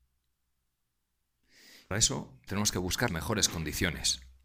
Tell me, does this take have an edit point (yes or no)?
yes